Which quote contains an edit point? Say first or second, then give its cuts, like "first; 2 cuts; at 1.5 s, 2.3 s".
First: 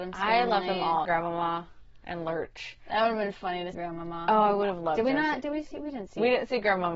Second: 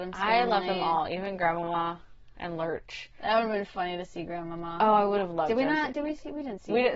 first; 2 cuts; at 1.0 s, 3.7 s